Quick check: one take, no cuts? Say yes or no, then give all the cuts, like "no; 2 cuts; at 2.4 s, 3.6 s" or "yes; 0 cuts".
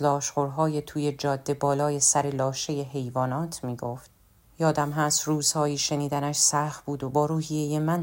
yes; 0 cuts